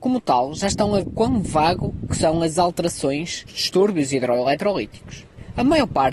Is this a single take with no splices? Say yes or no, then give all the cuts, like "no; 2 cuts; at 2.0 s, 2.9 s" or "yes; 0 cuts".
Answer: no; 3 cuts; at 1.0 s, 2.1 s, 3.5 s